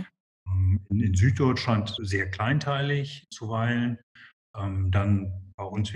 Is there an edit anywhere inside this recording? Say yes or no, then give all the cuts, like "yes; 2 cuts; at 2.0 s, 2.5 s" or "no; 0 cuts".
yes; 2 cuts; at 2.0 s, 3.3 s